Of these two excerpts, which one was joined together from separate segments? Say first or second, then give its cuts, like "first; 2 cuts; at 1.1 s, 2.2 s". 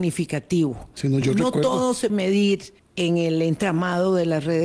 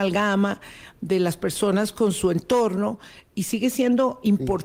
first; 3 cuts; at 1.2 s, 2.1 s, 2.8 s